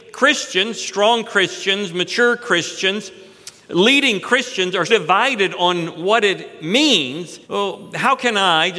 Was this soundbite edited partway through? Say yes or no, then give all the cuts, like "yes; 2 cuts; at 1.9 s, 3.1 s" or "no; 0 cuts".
yes; 2 cuts; at 4.9 s, 7.4 s